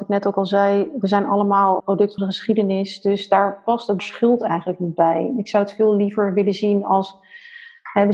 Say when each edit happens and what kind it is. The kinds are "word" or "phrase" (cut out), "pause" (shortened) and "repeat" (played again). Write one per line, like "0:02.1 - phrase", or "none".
0:01.8 - word
0:02.2 - word
0:04.0 - word